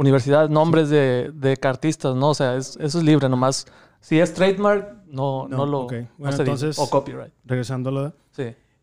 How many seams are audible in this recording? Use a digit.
0